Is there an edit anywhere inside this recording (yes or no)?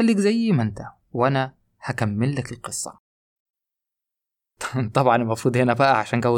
no